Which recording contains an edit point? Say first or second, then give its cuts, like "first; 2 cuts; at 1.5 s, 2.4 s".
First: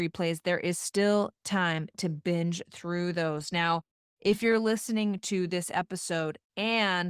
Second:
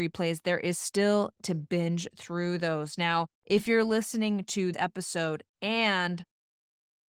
second; 3 cuts; at 1.4 s, 3.3 s, 4.7 s